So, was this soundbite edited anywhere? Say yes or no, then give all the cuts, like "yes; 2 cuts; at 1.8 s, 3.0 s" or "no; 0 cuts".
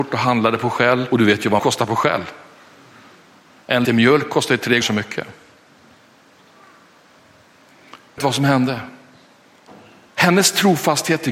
yes; 5 cuts; at 1.1 s, 1.6 s, 3.8 s, 4.8 s, 8.2 s